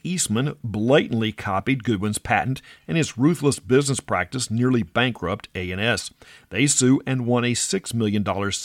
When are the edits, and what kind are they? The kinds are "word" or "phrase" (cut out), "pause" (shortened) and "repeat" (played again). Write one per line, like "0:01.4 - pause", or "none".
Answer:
none